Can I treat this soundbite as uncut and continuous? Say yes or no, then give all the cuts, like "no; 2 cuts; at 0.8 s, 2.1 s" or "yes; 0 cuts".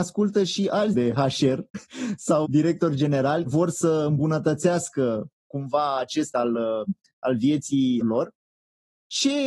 no; 6 cuts; at 0.9 s, 2.4 s, 3.5 s, 5.4 s, 6.3 s, 8.0 s